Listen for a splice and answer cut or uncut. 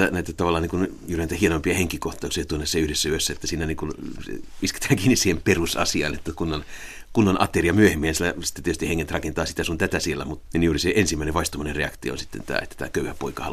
cut